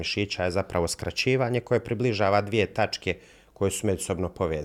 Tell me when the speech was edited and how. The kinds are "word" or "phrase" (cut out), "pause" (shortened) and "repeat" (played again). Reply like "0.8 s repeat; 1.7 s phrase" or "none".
none